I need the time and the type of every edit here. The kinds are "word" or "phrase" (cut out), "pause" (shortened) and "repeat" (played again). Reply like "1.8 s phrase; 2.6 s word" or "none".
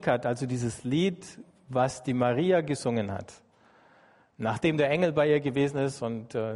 none